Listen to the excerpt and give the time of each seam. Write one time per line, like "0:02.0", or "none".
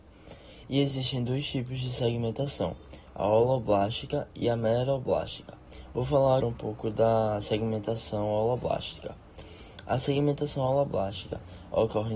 0:06.4